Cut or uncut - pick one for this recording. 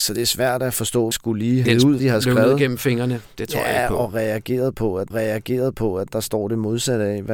cut